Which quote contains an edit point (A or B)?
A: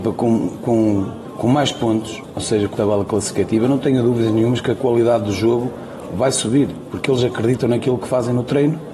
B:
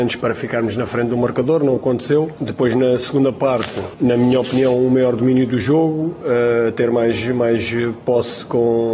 A